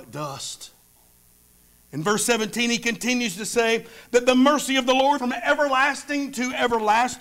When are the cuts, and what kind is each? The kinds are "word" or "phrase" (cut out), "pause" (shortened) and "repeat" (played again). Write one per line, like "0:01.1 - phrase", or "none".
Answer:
0:05.2 - word